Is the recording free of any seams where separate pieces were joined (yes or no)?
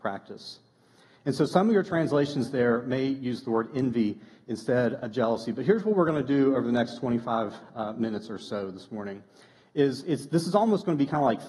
yes